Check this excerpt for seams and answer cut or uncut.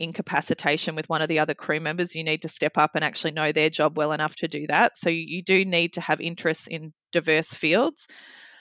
uncut